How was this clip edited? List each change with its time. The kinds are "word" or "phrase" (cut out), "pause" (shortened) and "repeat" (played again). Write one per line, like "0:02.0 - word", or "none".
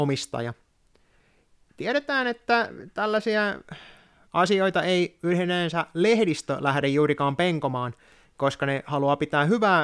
none